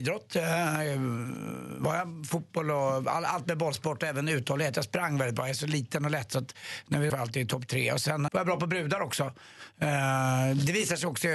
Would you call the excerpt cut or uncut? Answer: cut